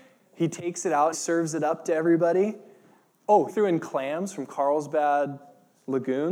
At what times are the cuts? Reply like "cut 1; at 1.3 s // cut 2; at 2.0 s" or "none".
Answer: cut 1; at 1.1 s // cut 2; at 3.5 s